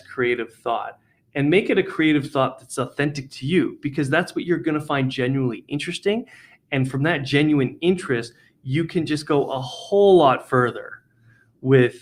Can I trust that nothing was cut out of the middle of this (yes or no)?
yes